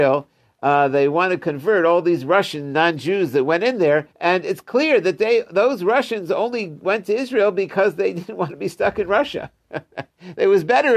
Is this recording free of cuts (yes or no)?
no